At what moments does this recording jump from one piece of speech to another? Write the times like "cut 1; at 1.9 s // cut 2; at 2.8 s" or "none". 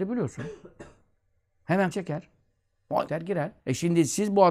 cut 1; at 1.9 s // cut 2; at 3.1 s // cut 3; at 3.6 s